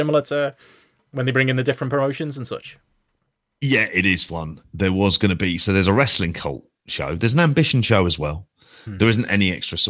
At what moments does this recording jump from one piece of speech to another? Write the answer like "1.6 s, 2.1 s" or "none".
4.3 s